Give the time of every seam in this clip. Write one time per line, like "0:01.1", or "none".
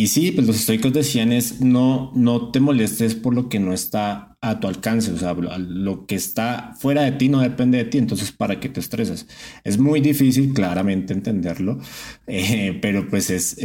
none